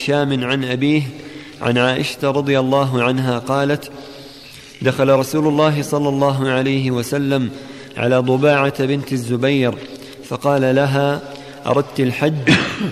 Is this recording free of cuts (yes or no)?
yes